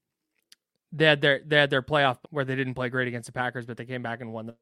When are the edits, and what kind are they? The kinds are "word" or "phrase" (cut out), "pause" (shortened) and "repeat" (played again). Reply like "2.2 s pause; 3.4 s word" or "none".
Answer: 2.2 s word